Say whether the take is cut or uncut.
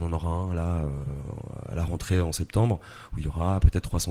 uncut